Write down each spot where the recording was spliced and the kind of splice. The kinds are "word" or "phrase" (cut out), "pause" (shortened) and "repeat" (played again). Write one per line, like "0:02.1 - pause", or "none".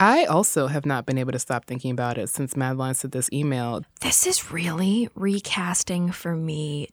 none